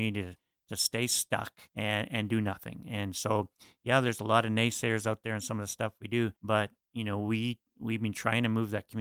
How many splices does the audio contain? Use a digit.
2